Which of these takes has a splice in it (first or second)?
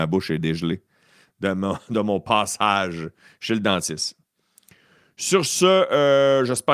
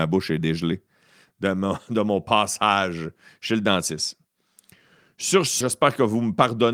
second